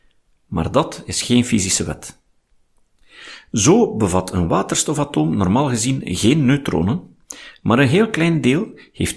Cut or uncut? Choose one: uncut